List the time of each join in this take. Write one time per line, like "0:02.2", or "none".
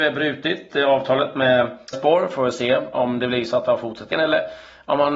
0:01.9
0:04.1